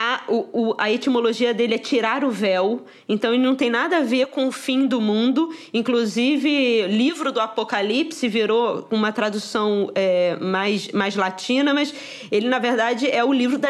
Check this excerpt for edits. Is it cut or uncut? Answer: uncut